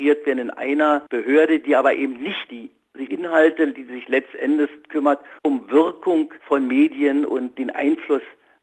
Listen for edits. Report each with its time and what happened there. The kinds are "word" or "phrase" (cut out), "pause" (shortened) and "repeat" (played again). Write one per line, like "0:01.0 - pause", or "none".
0:01.1 - pause
0:02.5 - phrase
0:03.1 - word
0:05.4 - pause
0:06.4 - pause